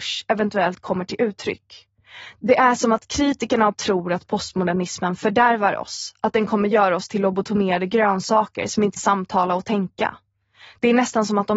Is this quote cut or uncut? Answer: cut